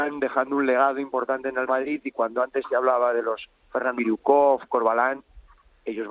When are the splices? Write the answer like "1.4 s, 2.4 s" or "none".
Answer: 1.7 s, 4.0 s